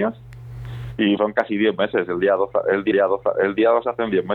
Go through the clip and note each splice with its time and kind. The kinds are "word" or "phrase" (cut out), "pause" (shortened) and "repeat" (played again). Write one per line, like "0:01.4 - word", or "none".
0:01.2 - word
0:02.9 - repeat